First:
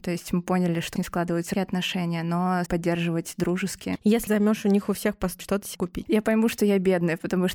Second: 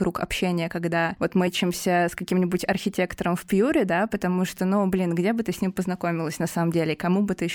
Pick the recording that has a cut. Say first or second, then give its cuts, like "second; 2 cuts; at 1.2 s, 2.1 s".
first; 6 cuts; at 1.0 s, 1.5 s, 2.7 s, 4.3 s, 5.4 s, 5.7 s